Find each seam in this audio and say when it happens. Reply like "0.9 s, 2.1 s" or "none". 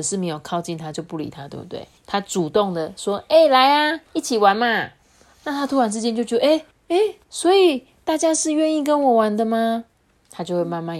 2.0 s, 4.1 s, 6.7 s, 7.2 s, 9.9 s